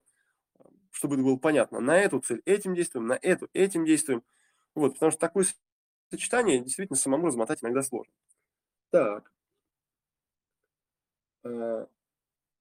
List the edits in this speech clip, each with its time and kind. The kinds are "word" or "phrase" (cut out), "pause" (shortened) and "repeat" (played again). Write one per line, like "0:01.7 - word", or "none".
none